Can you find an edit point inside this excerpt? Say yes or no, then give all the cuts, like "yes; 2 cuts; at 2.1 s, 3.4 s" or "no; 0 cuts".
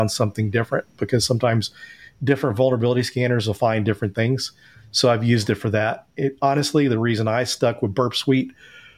no; 0 cuts